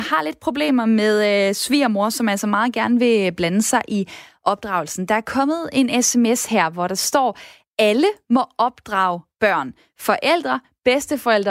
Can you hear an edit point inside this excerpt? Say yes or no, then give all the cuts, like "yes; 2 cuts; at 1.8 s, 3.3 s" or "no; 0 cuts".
no; 0 cuts